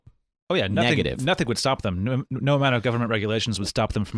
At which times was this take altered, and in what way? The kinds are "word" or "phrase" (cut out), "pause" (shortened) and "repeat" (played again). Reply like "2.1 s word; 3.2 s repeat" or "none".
none